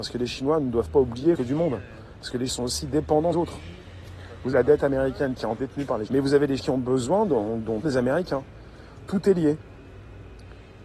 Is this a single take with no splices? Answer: no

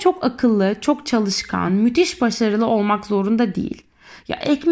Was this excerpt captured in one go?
yes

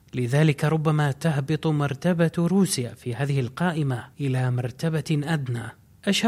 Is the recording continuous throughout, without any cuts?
yes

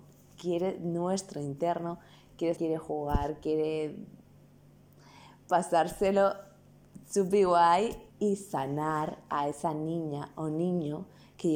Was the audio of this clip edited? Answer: yes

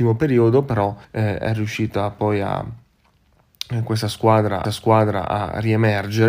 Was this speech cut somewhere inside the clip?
yes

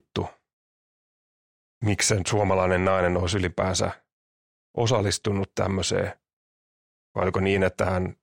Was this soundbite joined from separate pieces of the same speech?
no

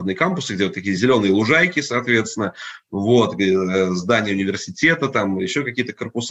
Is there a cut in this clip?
no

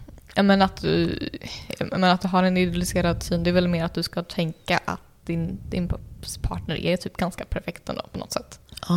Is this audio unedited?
yes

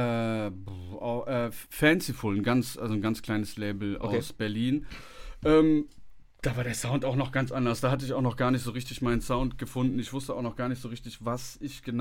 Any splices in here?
yes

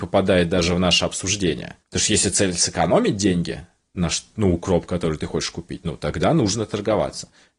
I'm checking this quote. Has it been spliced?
yes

